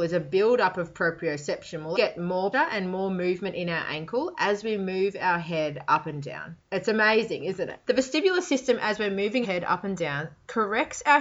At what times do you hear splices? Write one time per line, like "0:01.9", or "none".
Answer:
0:01.9
0:02.5
0:07.8
0:09.4